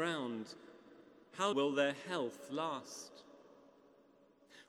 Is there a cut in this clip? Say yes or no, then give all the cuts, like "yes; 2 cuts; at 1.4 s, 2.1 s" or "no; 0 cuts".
yes; 1 cut; at 1.5 s